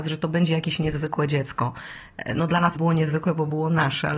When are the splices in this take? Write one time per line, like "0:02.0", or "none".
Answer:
0:02.7